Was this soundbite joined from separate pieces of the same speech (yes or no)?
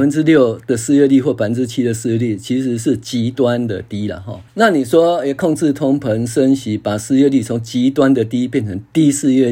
yes